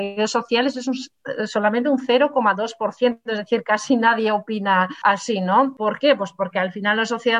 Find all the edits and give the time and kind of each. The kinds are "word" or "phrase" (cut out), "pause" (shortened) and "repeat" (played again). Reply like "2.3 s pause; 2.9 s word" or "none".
none